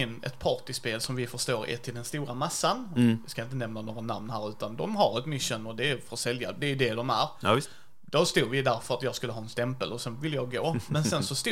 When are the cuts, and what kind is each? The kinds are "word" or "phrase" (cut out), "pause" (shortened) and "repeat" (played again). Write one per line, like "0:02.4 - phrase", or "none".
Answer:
none